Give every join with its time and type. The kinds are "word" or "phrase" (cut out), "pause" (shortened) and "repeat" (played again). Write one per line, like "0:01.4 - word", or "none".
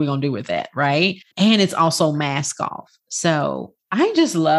0:01.3 - pause